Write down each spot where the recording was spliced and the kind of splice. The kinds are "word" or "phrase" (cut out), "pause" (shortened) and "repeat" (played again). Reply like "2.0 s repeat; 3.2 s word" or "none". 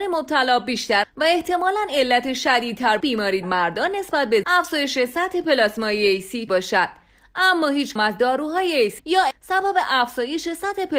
1.0 s word; 3.0 s word; 3.4 s word; 4.4 s word; 6.5 s word; 8.0 s word; 9.0 s word; 9.3 s word